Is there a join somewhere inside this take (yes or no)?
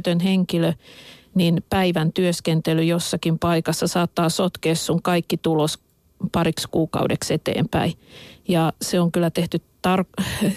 no